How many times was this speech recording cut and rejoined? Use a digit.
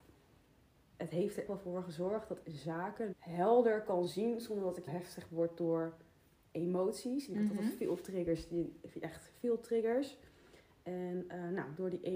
5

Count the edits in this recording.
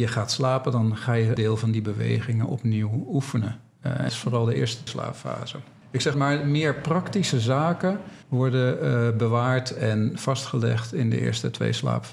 6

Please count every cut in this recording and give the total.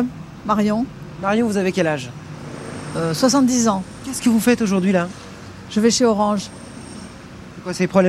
0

